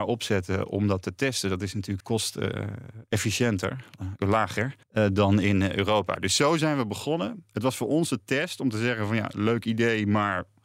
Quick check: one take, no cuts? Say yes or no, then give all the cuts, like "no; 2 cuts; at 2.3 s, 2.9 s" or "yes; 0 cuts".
no; 2 cuts; at 2.0 s, 4.8 s